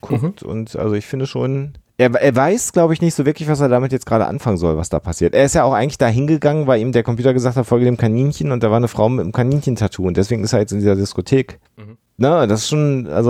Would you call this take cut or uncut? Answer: cut